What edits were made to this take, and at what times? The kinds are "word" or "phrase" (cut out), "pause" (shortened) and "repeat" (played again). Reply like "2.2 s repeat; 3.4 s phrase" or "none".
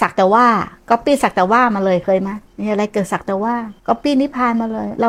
2.5 s pause; 3.8 s pause